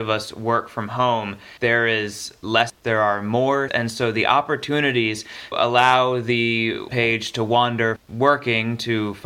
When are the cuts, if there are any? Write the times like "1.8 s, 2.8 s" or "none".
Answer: 1.6 s, 2.7 s, 3.7 s, 5.5 s, 6.9 s, 8.0 s